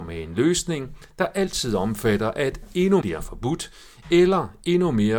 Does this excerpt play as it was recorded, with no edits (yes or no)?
no